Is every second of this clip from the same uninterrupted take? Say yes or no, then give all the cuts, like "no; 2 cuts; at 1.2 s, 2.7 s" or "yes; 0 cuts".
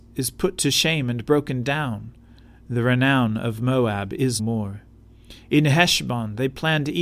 no; 1 cut; at 4.4 s